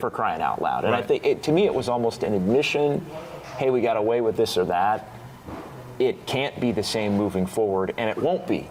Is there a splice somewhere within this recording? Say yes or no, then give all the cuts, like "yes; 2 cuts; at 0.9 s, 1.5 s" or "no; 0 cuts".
no; 0 cuts